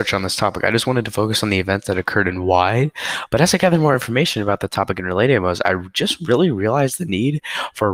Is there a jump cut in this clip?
no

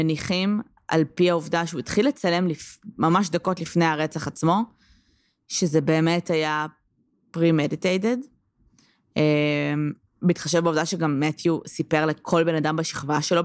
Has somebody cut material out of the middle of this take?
no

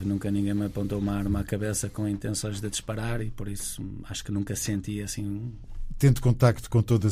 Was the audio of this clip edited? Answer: no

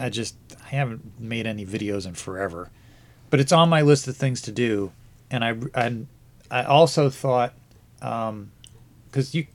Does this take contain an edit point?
no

